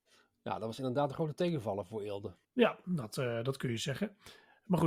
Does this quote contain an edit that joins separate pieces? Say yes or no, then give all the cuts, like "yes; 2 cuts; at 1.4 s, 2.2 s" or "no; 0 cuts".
yes; 1 cut; at 2.4 s